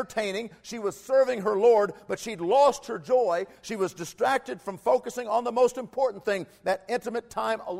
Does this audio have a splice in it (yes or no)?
no